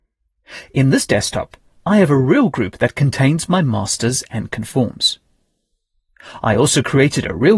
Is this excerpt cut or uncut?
uncut